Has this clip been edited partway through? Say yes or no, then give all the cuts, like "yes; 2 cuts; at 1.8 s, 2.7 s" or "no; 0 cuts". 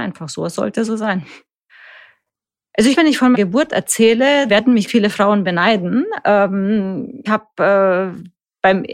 yes; 5 cuts; at 3.0 s, 3.3 s, 4.5 s, 4.9 s, 7.3 s